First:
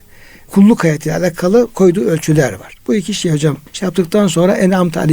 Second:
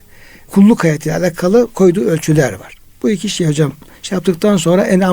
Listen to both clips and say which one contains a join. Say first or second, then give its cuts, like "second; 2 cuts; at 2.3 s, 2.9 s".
first; 2 cuts; at 2.8 s, 3.7 s